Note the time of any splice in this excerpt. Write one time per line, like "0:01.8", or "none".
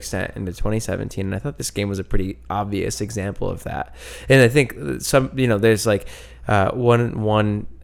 none